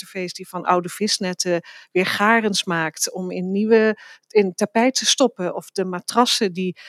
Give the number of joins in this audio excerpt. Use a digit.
0